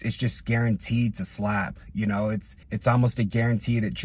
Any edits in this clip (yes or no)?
yes